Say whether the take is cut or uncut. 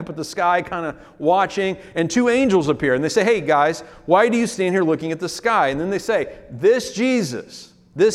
uncut